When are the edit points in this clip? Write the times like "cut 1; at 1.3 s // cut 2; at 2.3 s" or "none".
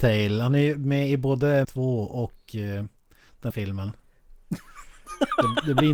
cut 1; at 1.6 s // cut 2; at 3.5 s